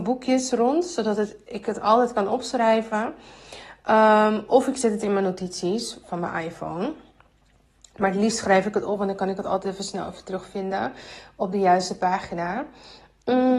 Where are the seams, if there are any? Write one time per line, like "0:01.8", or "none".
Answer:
none